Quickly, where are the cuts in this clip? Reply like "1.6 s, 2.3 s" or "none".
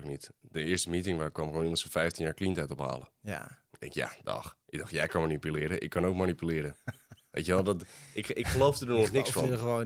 4.6 s